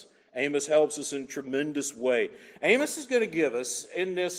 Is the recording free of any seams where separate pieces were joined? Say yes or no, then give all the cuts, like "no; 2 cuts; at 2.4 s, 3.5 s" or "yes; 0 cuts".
yes; 0 cuts